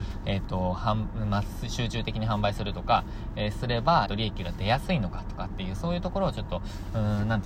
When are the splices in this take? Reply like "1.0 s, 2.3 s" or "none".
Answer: 4.1 s